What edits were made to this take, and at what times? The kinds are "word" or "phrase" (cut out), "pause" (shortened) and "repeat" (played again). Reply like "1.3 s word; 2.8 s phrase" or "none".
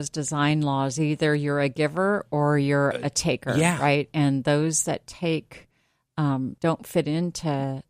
6.6 s pause